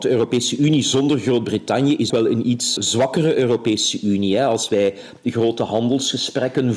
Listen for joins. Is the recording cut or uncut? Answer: cut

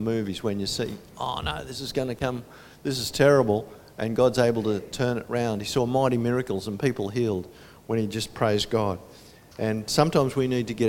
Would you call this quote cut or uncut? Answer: uncut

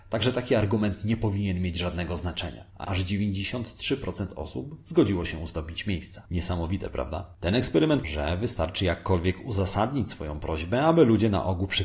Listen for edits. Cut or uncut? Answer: cut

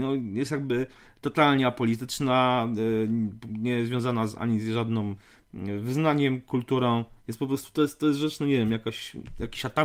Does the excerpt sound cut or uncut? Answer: uncut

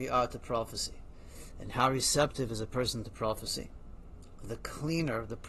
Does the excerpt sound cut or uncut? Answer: uncut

